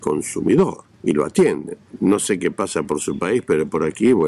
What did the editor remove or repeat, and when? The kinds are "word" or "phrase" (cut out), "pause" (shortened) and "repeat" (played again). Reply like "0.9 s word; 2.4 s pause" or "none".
0.9 s pause